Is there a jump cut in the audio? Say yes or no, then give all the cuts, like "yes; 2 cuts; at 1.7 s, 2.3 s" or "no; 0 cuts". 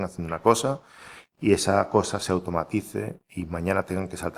no; 0 cuts